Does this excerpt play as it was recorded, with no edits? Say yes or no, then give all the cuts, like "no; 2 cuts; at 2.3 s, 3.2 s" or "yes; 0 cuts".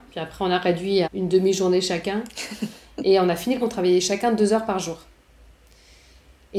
no; 2 cuts; at 1.0 s, 3.6 s